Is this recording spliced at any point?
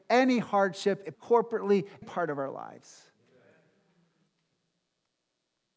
yes; 2 cuts; at 1.1 s, 2.0 s

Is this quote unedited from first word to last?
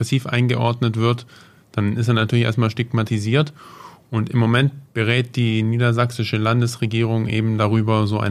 yes; 0 cuts

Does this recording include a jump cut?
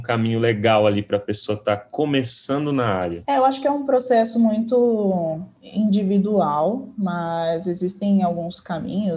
no; 0 cuts

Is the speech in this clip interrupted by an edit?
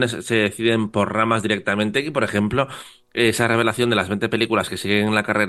no; 0 cuts

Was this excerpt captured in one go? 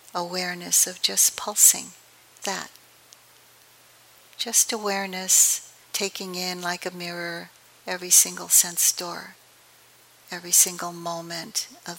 no; 2 cuts; at 2.4 s, 5.8 s

